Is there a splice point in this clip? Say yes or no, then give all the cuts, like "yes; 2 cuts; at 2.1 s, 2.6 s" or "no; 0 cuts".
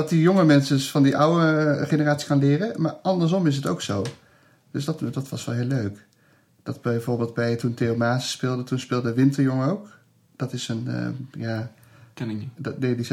no; 0 cuts